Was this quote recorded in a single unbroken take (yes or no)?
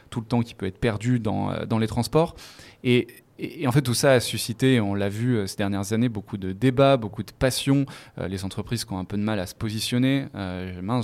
yes